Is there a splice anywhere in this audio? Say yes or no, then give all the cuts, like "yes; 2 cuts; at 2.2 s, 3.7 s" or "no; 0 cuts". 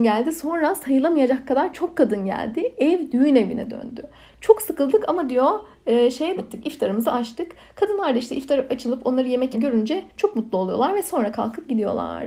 yes; 2 cuts; at 6.4 s, 9.5 s